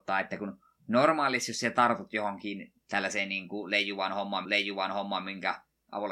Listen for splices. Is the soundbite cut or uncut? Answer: cut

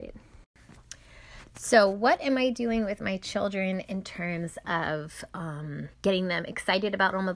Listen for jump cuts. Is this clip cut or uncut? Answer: cut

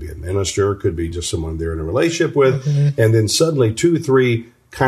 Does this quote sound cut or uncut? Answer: uncut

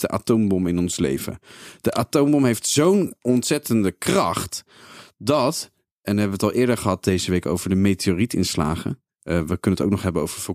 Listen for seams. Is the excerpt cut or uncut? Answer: uncut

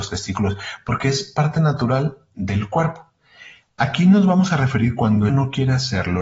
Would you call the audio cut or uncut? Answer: cut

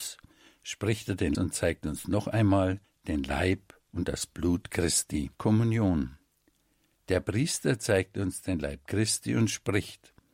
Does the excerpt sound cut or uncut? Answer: cut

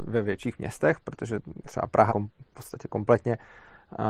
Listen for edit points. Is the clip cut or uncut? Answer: cut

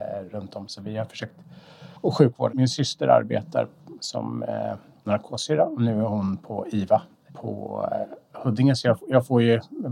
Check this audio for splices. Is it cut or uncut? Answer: cut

